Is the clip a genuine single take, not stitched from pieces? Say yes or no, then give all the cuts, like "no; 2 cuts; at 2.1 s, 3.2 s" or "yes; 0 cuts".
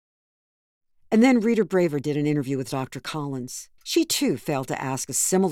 no; 1 cut; at 3.8 s